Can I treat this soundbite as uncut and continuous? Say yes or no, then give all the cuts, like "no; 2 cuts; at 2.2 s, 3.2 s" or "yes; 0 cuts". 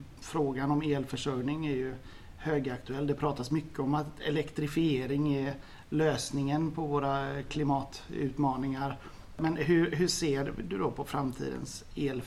yes; 0 cuts